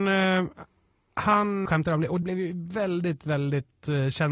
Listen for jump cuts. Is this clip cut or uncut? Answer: cut